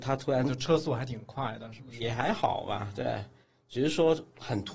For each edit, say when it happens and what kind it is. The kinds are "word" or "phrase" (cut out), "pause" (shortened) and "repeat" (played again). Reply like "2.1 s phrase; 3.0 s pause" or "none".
none